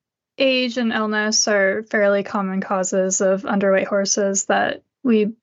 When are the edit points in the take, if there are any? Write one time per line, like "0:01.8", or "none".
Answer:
none